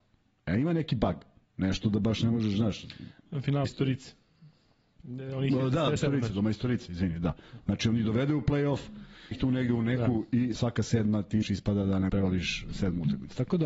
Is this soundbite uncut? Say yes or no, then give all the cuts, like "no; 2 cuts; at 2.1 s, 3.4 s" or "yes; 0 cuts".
no; 6 cuts; at 3.7 s, 6.0 s, 9.3 s, 10.6 s, 11.4 s, 12.1 s